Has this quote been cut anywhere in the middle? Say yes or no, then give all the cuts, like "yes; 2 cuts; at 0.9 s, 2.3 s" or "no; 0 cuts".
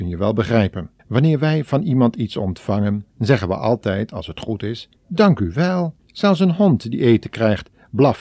yes; 4 cuts; at 1.0 s, 3.1 s, 5.0 s, 6.0 s